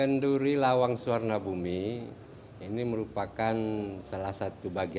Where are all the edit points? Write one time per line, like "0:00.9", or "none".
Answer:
none